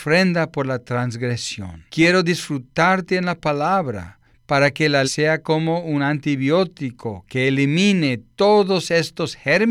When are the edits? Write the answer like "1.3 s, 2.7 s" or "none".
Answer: 1.9 s, 4.2 s, 5.0 s